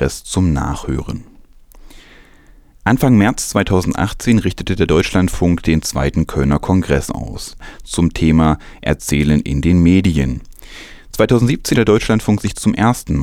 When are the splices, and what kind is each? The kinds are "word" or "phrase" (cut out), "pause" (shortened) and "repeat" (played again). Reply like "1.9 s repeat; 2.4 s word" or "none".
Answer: 11.7 s word